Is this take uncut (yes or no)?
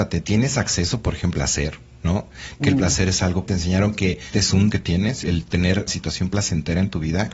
no